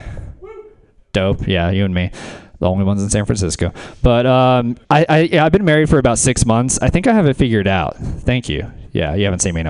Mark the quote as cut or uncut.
cut